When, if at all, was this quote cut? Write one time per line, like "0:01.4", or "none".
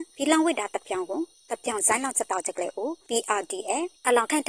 none

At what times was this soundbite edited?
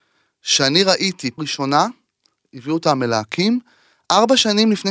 0:01.4

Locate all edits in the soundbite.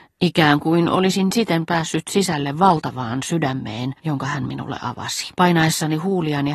0:04.0
0:05.3

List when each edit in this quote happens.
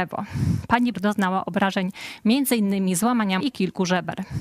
0:00.9
0:03.4

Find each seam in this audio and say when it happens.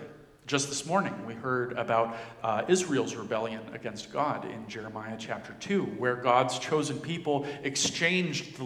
none

